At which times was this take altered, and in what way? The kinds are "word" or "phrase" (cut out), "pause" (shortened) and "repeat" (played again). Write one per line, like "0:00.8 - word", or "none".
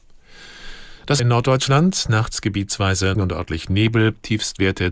0:01.2 - word
0:03.1 - phrase